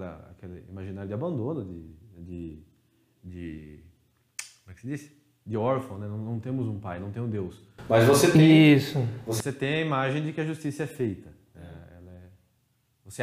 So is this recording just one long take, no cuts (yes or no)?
yes